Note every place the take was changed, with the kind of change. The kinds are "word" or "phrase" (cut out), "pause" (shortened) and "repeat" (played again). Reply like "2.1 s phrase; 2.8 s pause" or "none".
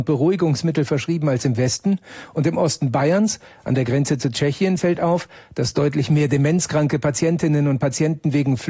none